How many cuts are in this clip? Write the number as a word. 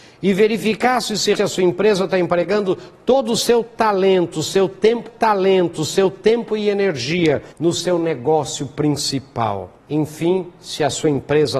four